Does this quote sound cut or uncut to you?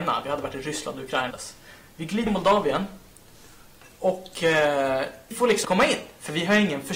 cut